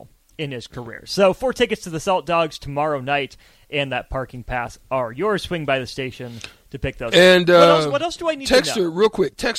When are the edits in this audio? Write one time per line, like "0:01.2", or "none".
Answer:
none